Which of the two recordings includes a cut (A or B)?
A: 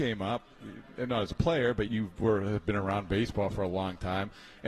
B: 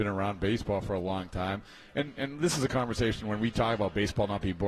A